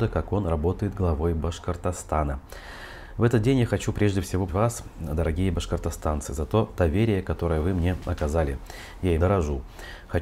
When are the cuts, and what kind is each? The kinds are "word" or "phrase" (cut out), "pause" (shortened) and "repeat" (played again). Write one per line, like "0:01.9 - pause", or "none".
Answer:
0:04.5 - word
0:09.2 - word